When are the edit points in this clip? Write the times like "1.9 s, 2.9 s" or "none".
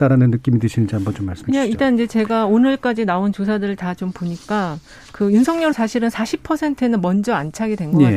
5.7 s